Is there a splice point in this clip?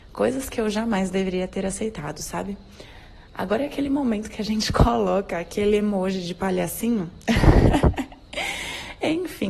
no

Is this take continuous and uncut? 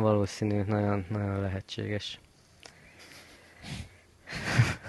yes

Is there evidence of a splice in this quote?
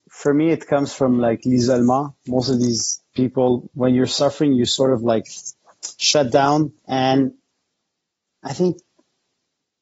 yes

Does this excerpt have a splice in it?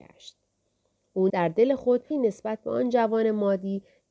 yes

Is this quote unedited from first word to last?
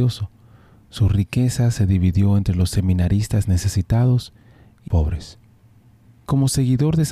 no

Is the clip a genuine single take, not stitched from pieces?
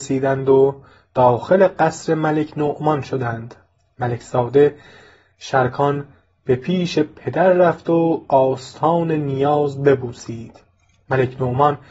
yes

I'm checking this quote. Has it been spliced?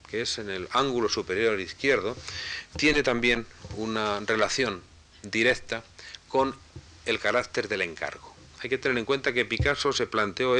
no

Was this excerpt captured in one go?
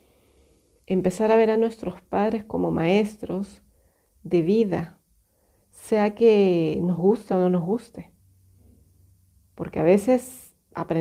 yes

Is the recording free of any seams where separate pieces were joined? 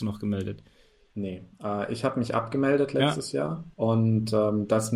no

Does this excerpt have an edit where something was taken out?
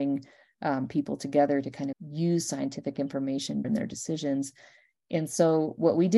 yes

